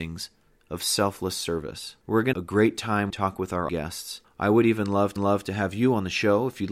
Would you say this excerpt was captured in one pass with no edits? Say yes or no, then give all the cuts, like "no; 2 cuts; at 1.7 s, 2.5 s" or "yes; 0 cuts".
no; 6 cuts; at 2.0 s, 2.3 s, 3.1 s, 3.7 s, 4.2 s, 5.2 s